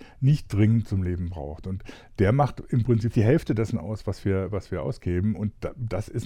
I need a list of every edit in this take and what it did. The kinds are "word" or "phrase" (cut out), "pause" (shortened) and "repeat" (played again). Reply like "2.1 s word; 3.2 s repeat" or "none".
3.1 s word